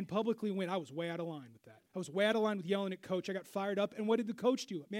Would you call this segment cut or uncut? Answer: cut